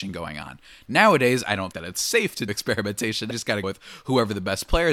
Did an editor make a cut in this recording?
yes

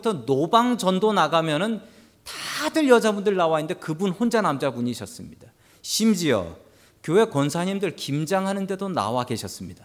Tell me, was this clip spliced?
no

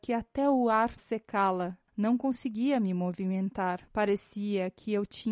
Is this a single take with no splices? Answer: no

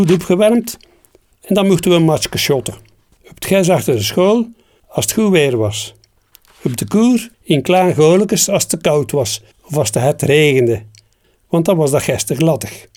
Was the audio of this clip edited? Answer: yes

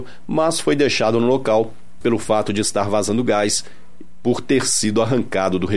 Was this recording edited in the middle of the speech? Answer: yes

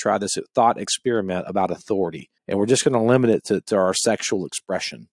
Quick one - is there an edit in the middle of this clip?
yes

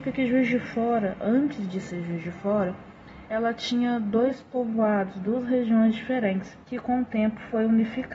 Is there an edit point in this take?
yes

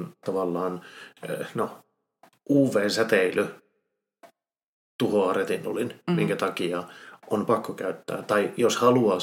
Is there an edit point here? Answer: no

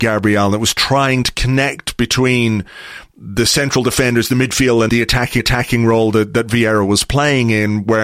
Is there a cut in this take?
yes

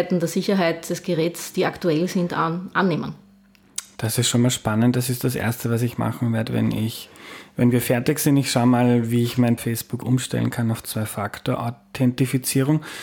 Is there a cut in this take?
yes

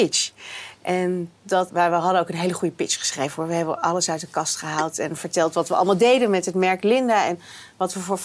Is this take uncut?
no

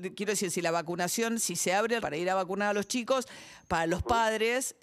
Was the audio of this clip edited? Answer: yes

